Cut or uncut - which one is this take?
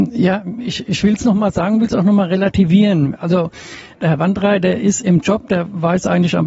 uncut